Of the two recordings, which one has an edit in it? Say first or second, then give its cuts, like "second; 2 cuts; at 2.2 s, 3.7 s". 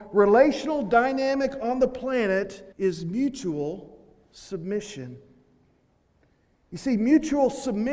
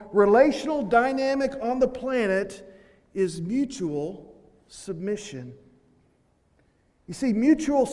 first; 1 cut; at 2.7 s